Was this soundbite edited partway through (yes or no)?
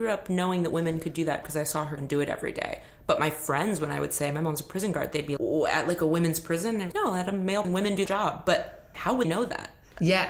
yes